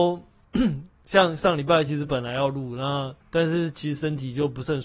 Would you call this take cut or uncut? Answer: cut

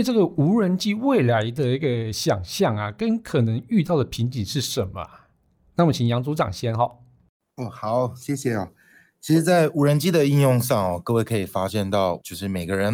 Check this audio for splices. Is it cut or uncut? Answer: uncut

